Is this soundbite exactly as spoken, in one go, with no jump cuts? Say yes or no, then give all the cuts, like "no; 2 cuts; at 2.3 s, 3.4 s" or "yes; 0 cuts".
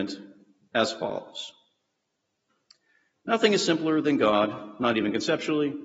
yes; 0 cuts